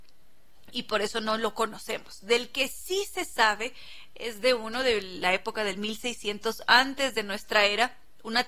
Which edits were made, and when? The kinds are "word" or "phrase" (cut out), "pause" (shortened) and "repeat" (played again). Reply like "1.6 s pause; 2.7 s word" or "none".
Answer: none